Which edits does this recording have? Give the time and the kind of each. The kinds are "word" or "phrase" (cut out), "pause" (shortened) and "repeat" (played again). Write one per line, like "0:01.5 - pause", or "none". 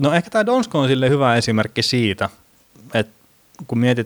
none